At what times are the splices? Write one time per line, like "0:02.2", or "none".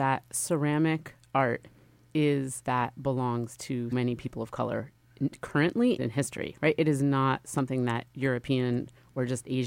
0:02.6
0:03.9
0:06.0